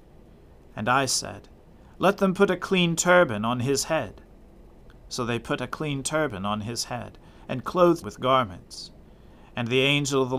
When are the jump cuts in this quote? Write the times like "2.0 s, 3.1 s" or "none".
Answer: 8.0 s